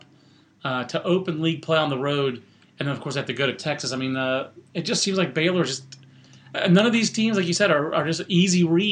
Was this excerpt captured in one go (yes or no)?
yes